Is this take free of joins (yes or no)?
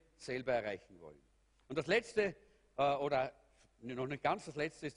yes